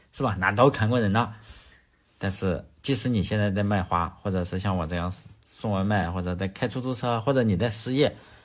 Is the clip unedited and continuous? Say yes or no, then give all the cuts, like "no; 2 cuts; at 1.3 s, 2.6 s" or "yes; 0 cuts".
yes; 0 cuts